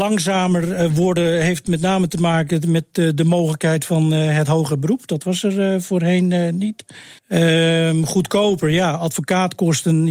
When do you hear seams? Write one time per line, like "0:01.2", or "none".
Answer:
0:07.2